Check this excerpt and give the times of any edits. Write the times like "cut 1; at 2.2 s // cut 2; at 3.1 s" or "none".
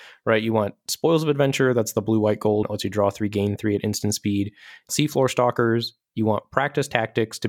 cut 1; at 2.6 s // cut 2; at 4.9 s